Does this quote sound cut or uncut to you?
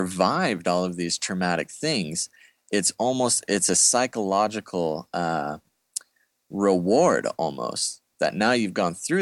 uncut